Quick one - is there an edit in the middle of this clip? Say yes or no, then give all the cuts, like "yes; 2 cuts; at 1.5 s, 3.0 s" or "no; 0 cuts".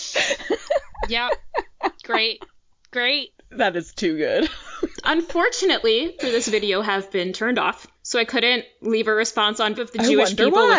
yes; 4 cuts; at 5.0 s, 6.2 s, 7.9 s, 9.7 s